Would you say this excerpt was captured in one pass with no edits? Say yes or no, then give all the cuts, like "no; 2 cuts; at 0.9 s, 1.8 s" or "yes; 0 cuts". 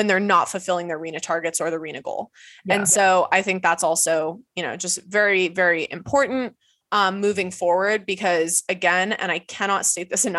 yes; 0 cuts